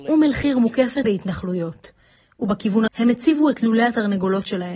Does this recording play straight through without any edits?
no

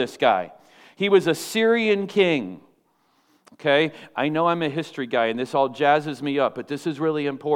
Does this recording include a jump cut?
no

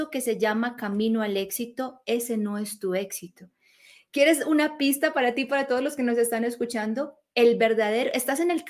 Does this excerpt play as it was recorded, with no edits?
yes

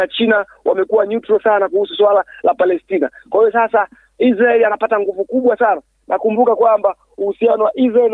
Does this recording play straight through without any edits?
yes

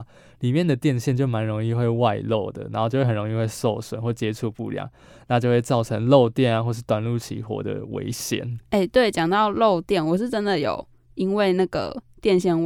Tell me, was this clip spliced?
no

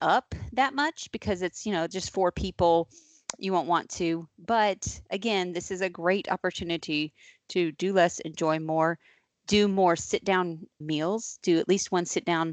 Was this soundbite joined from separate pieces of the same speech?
yes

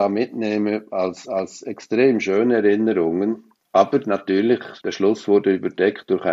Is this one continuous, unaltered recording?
no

